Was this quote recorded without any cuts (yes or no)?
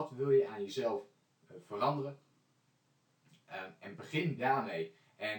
yes